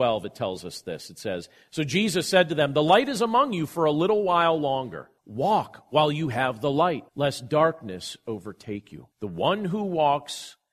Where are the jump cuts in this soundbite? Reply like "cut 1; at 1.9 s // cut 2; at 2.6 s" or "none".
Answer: cut 1; at 5.2 s // cut 2; at 7.1 s // cut 3; at 9.1 s

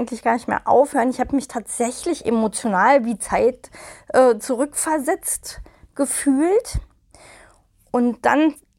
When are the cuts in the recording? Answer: none

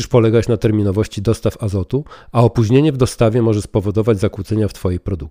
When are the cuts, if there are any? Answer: none

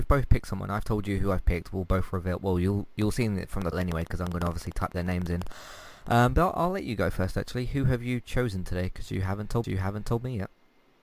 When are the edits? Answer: cut 1; at 3.7 s // cut 2; at 9.6 s

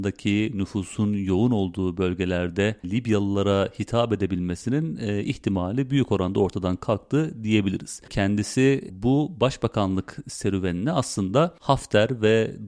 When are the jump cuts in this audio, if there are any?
none

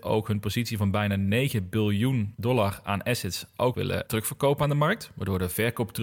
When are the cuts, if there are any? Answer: cut 1; at 3.7 s // cut 2; at 4.1 s

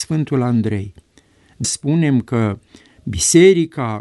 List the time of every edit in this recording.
cut 1; at 1.6 s

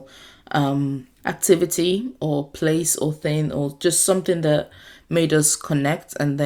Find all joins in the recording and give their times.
cut 1; at 1.2 s

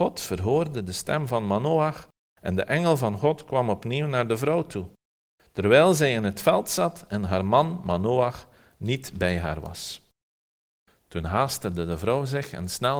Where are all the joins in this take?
none

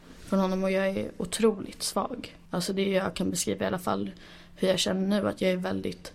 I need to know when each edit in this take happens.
cut 1; at 2.5 s

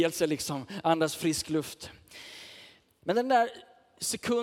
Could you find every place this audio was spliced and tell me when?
none

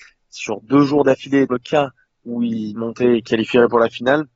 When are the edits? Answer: cut 1; at 1.5 s // cut 2; at 2.8 s // cut 3; at 3.3 s

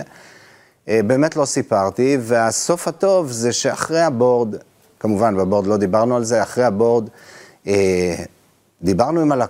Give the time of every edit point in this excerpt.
none

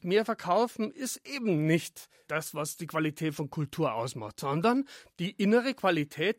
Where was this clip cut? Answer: none

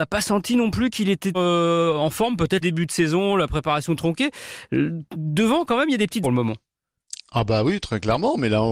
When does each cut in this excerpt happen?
cut 1; at 1.3 s // cut 2; at 2.6 s // cut 3; at 6.2 s

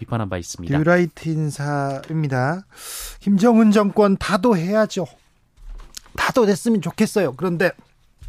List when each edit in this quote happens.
none

